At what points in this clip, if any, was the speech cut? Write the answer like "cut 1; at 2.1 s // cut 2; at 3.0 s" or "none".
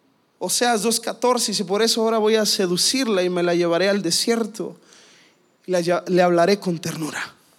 none